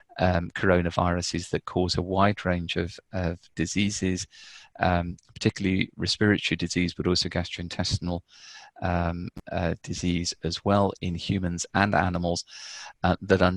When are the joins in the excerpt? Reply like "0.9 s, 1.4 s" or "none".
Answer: none